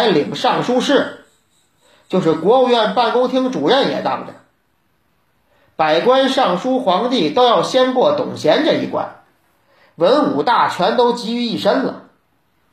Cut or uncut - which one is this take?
uncut